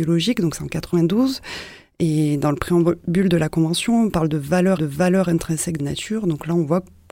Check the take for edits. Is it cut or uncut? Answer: cut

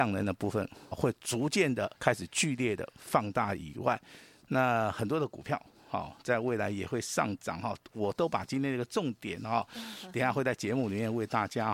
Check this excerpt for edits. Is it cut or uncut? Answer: cut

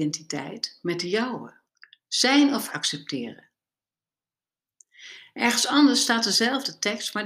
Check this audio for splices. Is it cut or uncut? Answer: cut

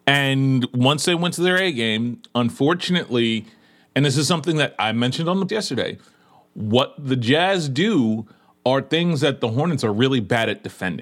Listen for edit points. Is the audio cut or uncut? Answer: cut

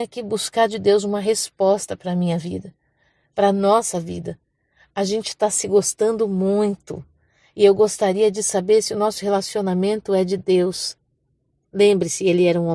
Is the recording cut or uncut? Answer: uncut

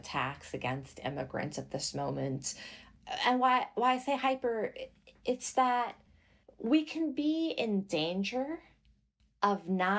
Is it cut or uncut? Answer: uncut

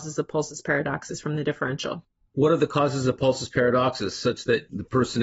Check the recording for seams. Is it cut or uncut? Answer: uncut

